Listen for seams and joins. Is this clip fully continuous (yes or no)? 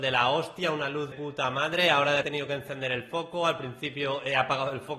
no